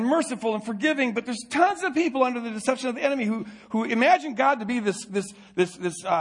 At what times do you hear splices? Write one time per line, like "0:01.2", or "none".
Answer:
none